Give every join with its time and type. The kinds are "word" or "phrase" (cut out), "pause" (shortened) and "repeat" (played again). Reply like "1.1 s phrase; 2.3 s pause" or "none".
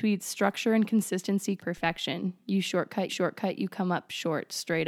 1.6 s word; 3.1 s repeat